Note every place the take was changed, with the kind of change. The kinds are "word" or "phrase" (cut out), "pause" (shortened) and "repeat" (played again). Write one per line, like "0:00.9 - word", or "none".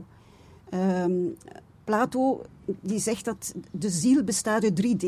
none